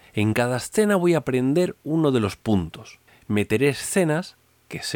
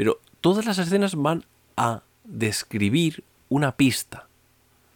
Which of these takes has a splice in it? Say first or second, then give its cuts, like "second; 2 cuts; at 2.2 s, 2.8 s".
first; 1 cut; at 3.1 s